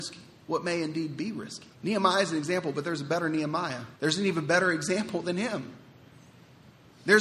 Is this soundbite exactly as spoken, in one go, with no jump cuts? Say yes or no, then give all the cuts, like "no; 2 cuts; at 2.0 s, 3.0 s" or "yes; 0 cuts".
no; 2 cuts; at 1.7 s, 4.0 s